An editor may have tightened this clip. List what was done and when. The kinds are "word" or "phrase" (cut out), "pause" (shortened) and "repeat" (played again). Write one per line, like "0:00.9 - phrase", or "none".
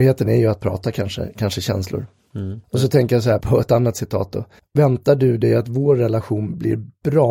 0:02.6 - pause
0:03.4 - word
0:04.6 - pause